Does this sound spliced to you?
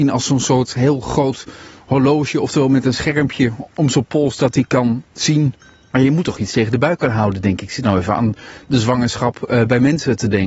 no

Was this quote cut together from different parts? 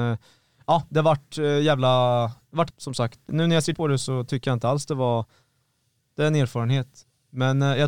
yes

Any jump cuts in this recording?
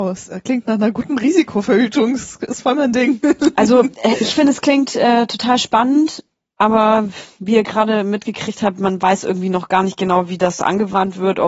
no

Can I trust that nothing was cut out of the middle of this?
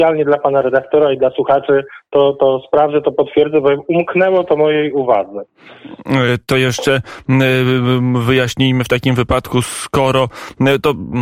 yes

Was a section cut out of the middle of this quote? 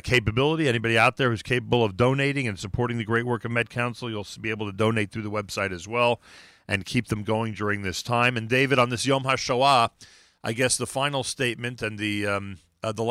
no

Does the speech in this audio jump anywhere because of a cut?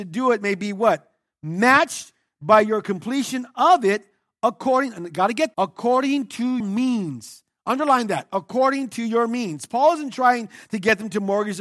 yes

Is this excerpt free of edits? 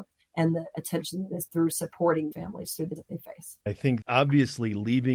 no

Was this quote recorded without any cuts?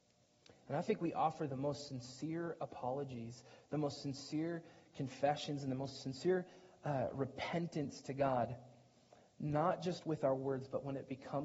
yes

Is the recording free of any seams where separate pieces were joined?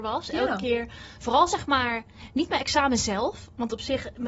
yes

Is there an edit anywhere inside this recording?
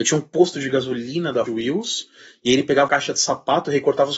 yes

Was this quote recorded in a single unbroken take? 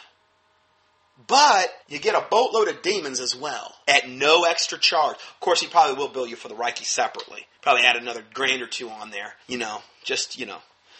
no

